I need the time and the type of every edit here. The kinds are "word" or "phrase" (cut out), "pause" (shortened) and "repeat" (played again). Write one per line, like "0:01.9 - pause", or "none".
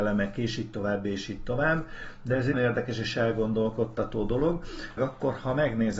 0:02.5 - word
0:05.0 - word